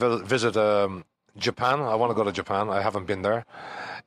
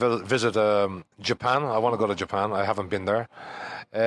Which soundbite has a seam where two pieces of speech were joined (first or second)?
second